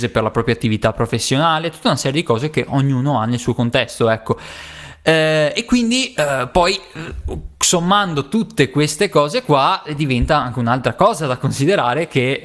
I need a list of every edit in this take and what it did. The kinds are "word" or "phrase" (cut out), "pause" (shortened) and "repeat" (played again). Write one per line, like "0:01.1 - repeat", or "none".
none